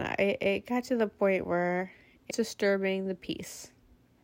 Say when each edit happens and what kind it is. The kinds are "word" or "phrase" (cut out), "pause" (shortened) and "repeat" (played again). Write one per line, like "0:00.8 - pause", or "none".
0:02.3 - word